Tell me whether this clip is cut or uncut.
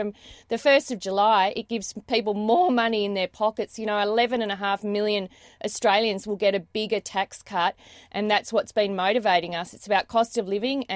uncut